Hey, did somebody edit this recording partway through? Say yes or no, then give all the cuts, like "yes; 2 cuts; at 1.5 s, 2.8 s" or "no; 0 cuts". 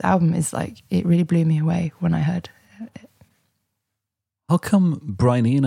no; 0 cuts